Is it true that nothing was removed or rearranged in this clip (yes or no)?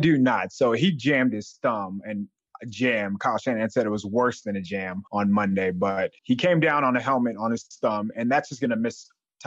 no